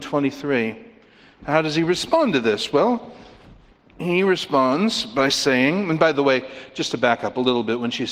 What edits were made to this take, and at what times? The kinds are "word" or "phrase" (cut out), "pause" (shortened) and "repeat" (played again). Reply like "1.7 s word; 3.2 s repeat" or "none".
none